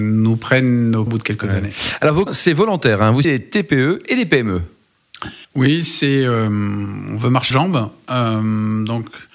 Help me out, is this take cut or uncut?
cut